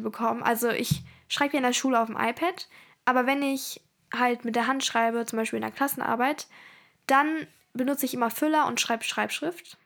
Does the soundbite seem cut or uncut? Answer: uncut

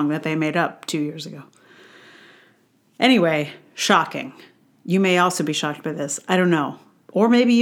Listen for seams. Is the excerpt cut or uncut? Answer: uncut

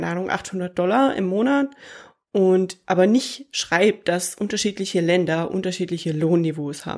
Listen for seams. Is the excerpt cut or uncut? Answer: uncut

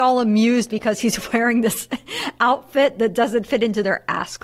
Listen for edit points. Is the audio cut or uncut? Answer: uncut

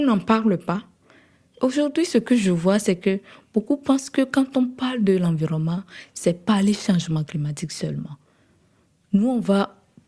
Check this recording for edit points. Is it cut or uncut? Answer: uncut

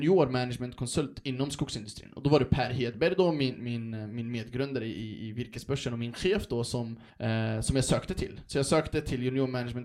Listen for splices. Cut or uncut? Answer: cut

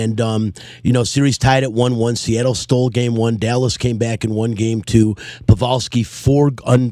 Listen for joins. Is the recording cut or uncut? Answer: uncut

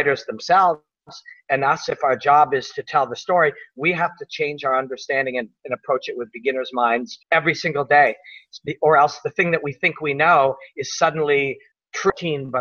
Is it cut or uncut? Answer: cut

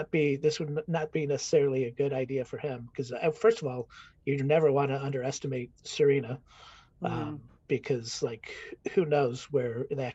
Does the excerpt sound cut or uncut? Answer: cut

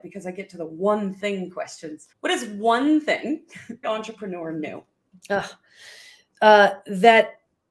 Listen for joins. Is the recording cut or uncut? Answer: cut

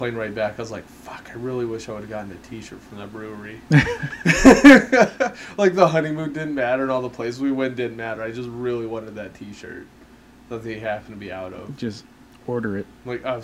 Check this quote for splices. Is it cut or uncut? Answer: uncut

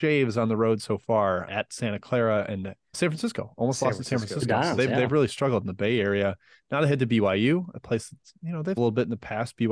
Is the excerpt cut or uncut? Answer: cut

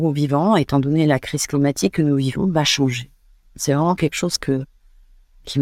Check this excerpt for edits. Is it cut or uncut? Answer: uncut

